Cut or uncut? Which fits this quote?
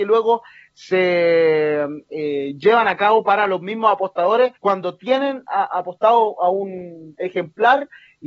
cut